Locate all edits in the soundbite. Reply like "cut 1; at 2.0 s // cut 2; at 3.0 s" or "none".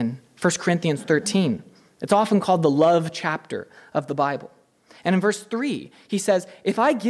none